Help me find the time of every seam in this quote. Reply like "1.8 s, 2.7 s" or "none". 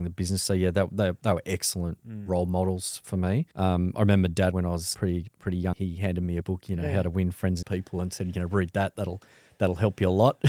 3.5 s, 4.5 s, 4.9 s, 5.7 s, 6.4 s, 7.6 s